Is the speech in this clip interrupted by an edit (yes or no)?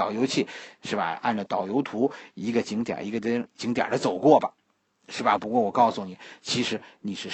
no